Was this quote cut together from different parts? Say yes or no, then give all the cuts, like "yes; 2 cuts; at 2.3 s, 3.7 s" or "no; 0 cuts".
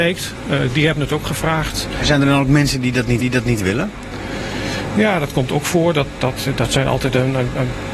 yes; 1 cut; at 3.2 s